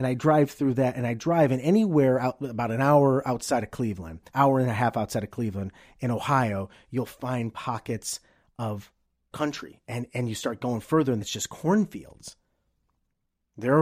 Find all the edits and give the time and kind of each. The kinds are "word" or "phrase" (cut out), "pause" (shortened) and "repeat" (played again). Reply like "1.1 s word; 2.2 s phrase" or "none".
4.3 s pause; 9.3 s word; 11.2 s word